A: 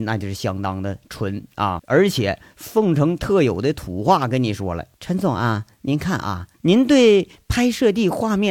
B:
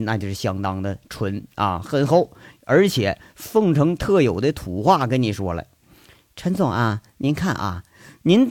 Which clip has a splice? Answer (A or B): A